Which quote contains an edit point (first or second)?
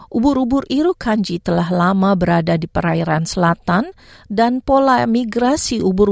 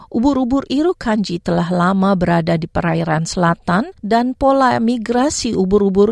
second